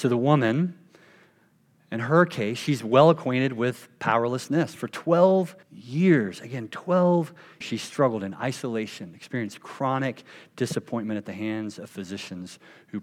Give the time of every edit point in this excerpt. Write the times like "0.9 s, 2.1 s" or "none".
5.6 s, 7.6 s